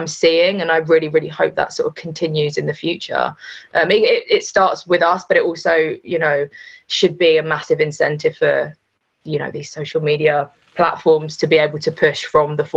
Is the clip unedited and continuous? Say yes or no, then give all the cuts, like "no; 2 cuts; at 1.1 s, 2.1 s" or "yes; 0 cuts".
yes; 0 cuts